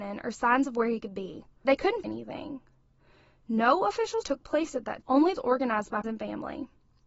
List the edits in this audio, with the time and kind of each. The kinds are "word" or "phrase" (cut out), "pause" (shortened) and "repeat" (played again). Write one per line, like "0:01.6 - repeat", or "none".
0:01.6 - word
0:02.0 - word
0:04.2 - word
0:05.0 - word
0:05.4 - word
0:06.0 - word